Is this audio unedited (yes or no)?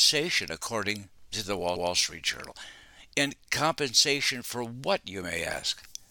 no